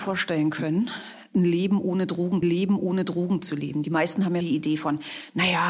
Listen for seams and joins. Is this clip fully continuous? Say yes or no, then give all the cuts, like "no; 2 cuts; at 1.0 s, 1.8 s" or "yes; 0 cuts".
no; 2 cuts; at 2.4 s, 4.4 s